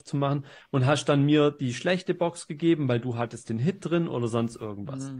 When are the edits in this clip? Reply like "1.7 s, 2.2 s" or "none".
none